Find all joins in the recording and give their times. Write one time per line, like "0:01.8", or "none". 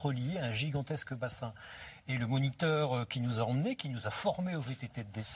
none